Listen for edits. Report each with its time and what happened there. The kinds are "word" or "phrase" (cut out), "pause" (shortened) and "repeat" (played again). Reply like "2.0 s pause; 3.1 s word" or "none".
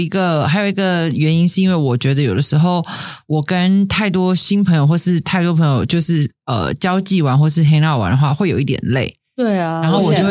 none